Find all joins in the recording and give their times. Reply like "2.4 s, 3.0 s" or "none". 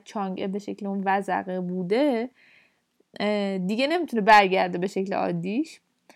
none